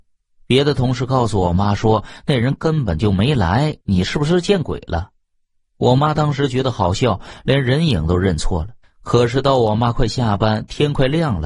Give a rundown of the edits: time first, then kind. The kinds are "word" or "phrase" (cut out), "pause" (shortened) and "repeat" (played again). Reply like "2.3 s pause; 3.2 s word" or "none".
3.8 s pause; 8.8 s pause